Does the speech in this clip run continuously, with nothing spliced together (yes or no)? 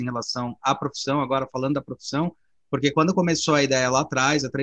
yes